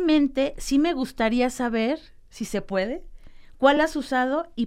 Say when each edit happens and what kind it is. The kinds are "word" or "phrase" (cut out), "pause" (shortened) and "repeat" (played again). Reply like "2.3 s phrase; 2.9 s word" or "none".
none